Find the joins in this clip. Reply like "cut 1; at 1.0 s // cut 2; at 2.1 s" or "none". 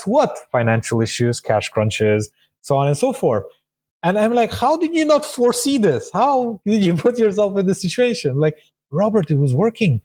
none

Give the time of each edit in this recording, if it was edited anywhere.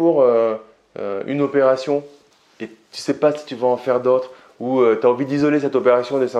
none

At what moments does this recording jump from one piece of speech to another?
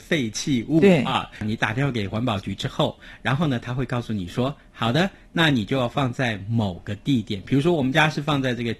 none

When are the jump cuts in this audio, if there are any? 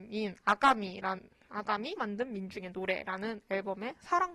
cut 1; at 2.0 s

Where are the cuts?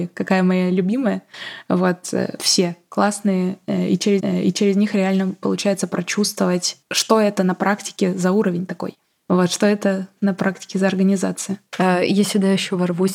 cut 1; at 2.4 s // cut 2; at 4.2 s // cut 3; at 6.8 s // cut 4; at 11.7 s

